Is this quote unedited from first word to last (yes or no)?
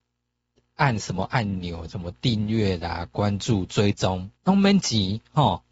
no